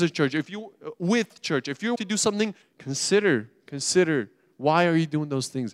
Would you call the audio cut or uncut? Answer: cut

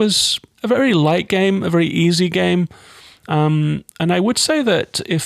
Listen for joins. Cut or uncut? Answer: uncut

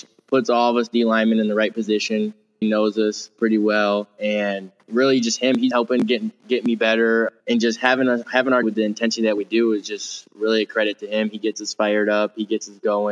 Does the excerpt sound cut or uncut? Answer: cut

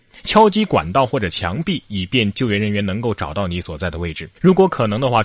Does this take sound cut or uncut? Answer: cut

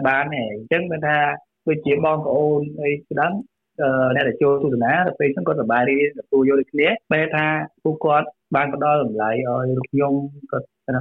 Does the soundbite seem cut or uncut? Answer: cut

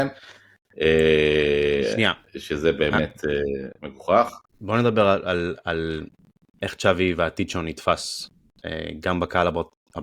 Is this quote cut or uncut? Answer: cut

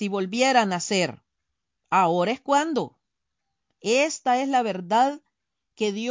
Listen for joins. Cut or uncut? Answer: uncut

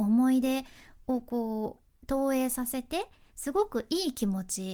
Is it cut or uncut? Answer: uncut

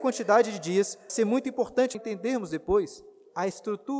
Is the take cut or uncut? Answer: cut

